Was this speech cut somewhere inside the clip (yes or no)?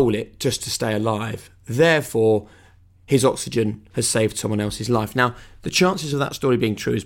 no